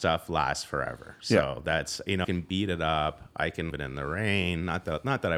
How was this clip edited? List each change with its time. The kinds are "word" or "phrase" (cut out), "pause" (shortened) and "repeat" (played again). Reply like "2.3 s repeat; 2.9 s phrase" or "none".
2.2 s word; 3.7 s word